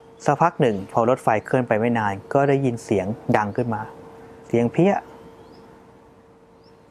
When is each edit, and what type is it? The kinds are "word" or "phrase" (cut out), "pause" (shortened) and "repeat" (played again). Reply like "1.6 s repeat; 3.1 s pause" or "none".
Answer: 4.4 s pause